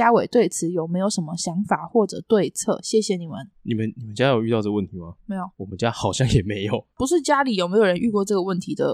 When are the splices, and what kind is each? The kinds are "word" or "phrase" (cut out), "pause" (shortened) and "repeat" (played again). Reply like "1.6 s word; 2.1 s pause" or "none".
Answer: 3.5 s pause; 5.2 s pause; 5.5 s pause; 6.9 s pause